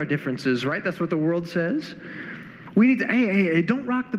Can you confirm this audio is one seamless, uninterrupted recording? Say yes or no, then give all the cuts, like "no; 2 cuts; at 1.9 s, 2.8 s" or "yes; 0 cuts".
yes; 0 cuts